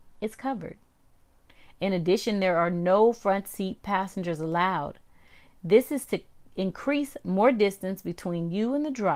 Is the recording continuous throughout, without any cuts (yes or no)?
yes